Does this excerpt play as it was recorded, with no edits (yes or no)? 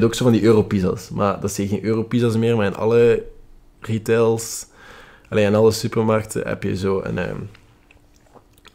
yes